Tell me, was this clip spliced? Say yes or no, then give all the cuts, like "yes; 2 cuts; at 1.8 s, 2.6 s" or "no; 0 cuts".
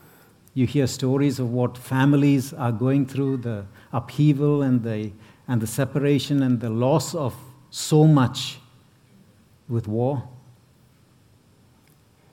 no; 0 cuts